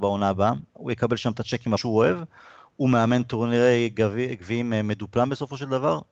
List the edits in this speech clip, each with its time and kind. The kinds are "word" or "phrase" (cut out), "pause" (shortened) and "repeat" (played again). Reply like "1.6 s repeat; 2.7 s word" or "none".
1.8 s phrase